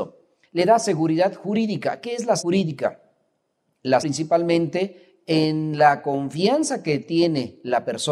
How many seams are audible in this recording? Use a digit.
2